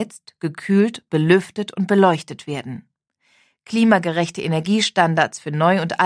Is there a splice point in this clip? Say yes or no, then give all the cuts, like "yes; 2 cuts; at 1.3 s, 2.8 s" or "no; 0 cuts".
no; 0 cuts